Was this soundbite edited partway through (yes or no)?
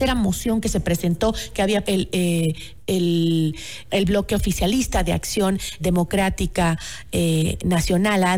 yes